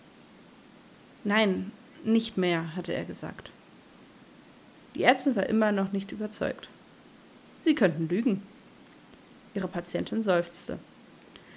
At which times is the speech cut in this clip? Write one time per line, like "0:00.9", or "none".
none